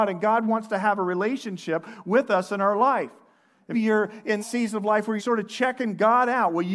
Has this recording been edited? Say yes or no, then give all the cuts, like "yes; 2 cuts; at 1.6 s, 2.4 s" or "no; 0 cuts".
yes; 3 cuts; at 3.7 s, 4.4 s, 5.2 s